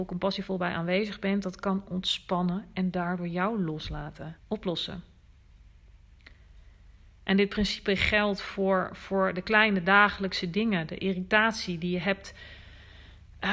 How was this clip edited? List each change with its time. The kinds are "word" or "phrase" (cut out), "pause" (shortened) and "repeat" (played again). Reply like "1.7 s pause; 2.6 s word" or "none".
4.4 s pause